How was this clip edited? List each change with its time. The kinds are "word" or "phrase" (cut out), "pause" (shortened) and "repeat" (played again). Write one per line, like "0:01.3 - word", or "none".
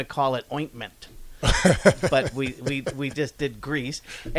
none